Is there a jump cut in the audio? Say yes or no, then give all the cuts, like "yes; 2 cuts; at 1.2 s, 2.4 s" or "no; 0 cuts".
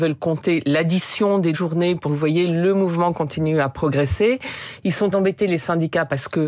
yes; 3 cuts; at 1.5 s, 2.0 s, 5.1 s